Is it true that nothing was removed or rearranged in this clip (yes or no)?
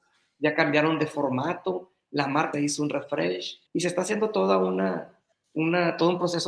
no